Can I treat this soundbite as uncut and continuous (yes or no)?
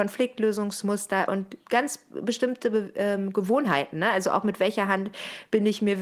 yes